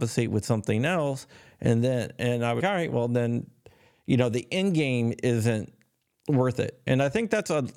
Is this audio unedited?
no; 1 cut; at 2.6 s

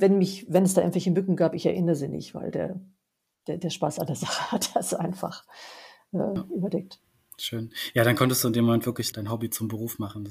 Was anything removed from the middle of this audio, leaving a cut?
yes; 1 cut; at 9.1 s

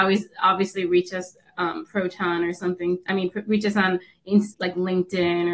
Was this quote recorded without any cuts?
no; 1 cut; at 4.5 s

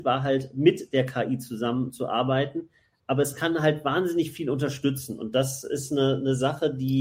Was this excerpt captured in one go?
yes; 0 cuts

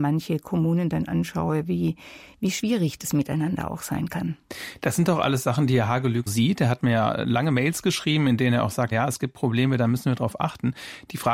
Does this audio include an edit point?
yes; 2 cuts; at 6.3 s, 8.9 s

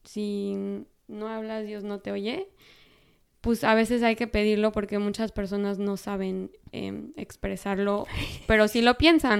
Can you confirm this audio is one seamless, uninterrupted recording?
yes; 0 cuts

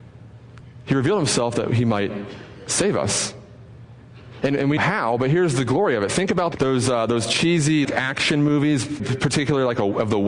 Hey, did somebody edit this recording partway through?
yes; 4 cuts; at 4.8 s, 6.5 s, 7.8 s, 9.0 s

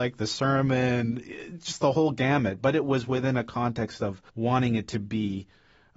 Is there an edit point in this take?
yes; 1 cut; at 4.3 s

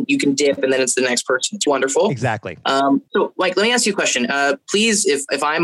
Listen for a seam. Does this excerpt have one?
yes; 2 cuts; at 1.7 s, 3.1 s

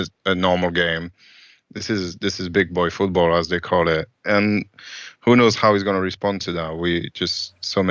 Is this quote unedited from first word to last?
yes; 0 cuts

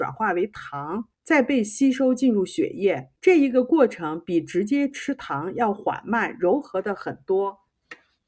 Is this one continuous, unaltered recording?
no; 2 cuts; at 1.1 s, 3.2 s

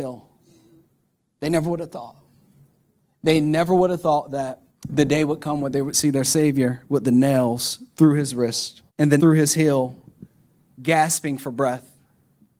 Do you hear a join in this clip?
yes; 3 cuts; at 4.7 s, 8.9 s, 9.2 s

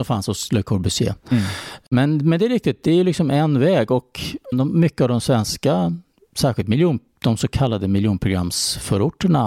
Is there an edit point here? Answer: yes; 1 cut; at 4.5 s

